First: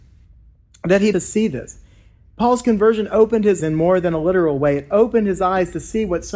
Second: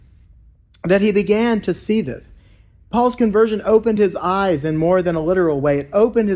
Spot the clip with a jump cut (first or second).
first